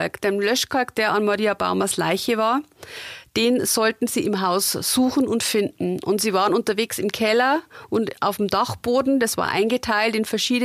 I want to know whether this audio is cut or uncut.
uncut